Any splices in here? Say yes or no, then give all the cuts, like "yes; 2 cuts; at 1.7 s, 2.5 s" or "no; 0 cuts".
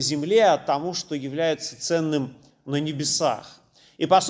no; 0 cuts